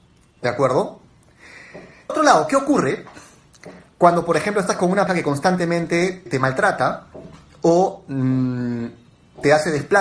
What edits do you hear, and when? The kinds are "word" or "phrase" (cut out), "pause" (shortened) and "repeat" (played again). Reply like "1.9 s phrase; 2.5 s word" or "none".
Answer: 2.1 s word; 5.1 s word; 6.3 s word